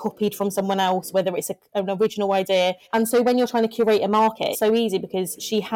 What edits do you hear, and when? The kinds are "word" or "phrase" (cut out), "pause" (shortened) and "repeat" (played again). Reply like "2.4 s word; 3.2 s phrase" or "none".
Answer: 2.8 s pause; 4.5 s phrase

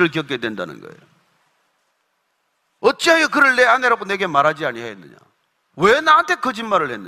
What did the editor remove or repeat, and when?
none

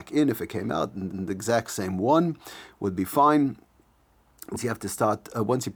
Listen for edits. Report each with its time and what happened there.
1.1 s repeat

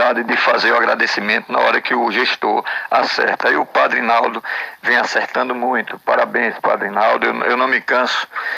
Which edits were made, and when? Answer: none

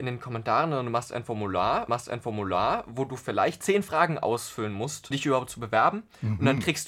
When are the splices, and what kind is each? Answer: 1.9 s repeat; 5.1 s word

